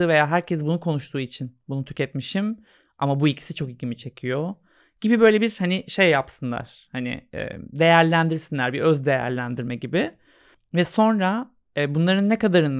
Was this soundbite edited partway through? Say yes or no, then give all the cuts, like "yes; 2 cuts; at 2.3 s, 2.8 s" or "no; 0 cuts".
no; 0 cuts